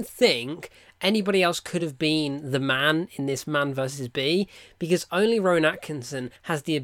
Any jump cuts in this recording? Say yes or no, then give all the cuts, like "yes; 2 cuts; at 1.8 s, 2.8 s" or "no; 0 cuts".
no; 0 cuts